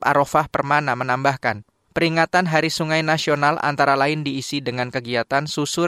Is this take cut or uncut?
uncut